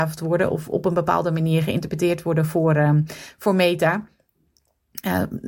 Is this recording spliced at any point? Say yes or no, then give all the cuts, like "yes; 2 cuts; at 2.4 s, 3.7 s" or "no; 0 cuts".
no; 0 cuts